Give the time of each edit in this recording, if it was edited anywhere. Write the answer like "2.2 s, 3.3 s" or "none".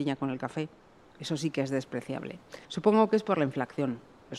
2.6 s